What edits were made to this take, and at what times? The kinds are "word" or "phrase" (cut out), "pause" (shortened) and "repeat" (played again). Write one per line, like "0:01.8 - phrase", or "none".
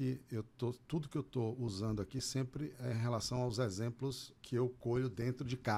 0:04.4 - pause